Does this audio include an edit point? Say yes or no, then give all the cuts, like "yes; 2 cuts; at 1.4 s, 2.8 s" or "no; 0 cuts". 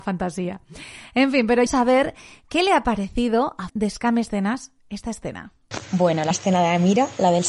yes; 4 cuts; at 1.7 s, 3.7 s, 4.8 s, 6.3 s